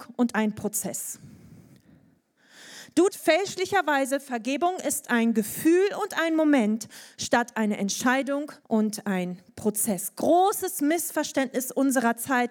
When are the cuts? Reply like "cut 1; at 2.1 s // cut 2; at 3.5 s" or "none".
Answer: cut 1; at 3.1 s // cut 2; at 8.6 s